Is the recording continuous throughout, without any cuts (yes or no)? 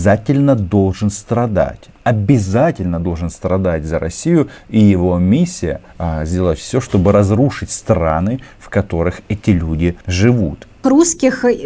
no